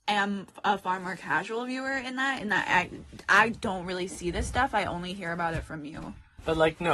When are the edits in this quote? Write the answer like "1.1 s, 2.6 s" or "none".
none